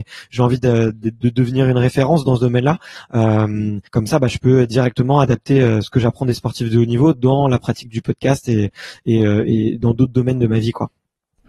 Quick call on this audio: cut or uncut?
cut